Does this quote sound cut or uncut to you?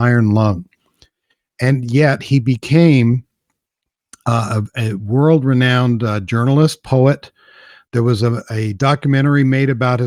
uncut